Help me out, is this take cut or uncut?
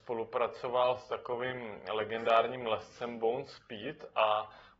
uncut